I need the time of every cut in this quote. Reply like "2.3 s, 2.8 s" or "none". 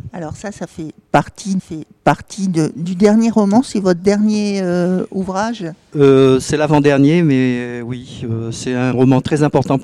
1.6 s